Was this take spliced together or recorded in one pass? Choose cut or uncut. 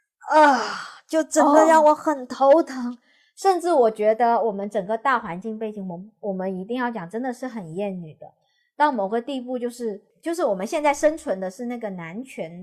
uncut